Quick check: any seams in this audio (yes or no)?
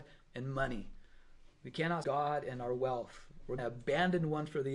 yes